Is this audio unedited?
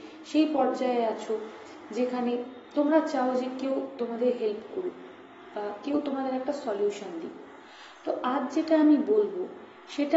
yes; 0 cuts

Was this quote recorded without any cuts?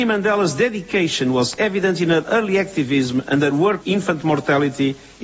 no; 1 cut; at 3.8 s

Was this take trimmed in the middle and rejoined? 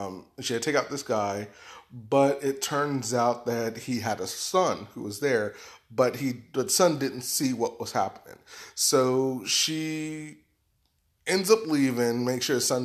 no; 0 cuts

